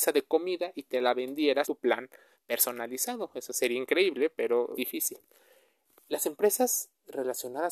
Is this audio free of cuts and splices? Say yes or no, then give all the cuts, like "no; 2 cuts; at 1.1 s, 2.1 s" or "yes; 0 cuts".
no; 2 cuts; at 1.6 s, 4.7 s